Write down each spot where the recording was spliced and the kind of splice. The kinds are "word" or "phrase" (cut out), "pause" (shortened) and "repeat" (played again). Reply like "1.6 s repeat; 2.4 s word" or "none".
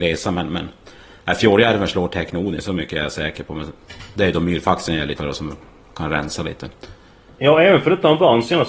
5.2 s word